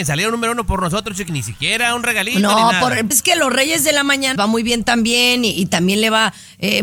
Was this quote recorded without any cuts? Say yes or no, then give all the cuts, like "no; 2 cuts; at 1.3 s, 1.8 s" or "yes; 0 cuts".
no; 3 cuts; at 1.3 s, 3.1 s, 4.4 s